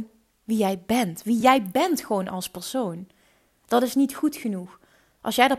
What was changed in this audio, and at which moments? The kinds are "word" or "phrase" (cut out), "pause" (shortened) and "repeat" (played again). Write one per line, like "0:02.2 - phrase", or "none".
none